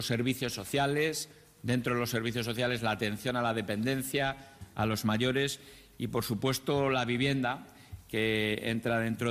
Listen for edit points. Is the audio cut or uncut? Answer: uncut